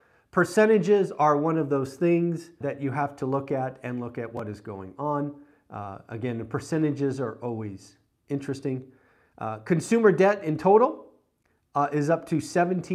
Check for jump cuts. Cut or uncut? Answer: cut